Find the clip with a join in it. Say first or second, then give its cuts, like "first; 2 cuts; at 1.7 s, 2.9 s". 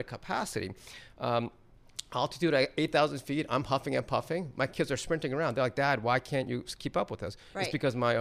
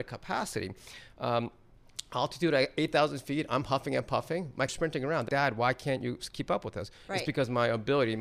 second; 2 cuts; at 4.7 s, 5.3 s